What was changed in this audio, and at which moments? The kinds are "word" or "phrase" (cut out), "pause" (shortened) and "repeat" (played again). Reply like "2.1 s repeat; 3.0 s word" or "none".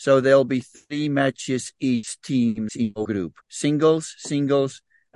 1.8 s word; 2.7 s word; 3.4 s pause